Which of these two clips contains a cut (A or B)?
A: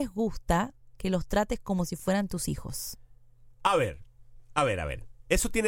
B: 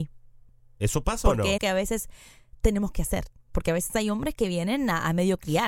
B